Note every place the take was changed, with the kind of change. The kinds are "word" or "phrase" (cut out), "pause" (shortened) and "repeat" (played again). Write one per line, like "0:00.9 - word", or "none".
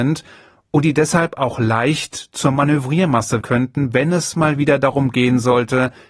0:03.4 - word